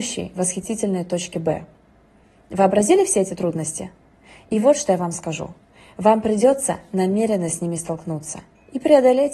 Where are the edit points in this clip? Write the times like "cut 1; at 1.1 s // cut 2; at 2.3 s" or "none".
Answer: none